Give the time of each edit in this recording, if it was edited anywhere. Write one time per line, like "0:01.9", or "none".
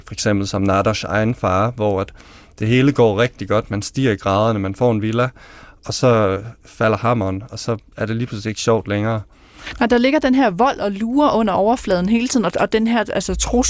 none

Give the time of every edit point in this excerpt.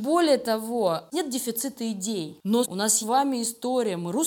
0:01.1
0:02.6
0:03.0

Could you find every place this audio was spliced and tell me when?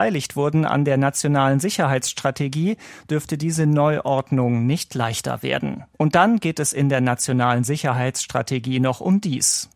0:05.9

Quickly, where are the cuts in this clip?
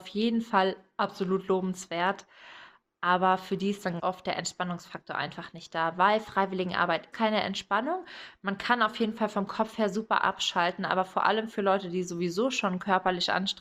0:04.0
0:07.1

